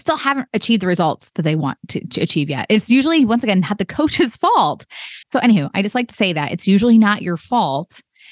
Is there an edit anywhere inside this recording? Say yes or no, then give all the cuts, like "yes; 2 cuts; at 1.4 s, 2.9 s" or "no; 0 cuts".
yes; 1 cut; at 5.2 s